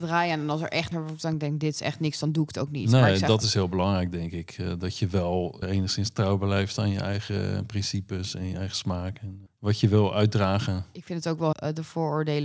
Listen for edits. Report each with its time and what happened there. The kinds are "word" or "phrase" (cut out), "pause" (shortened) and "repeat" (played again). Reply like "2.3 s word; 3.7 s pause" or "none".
0.9 s word; 5.6 s word; 9.5 s word; 11.5 s word